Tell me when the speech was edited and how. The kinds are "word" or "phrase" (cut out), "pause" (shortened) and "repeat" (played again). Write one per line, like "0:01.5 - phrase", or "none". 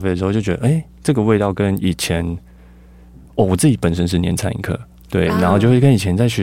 none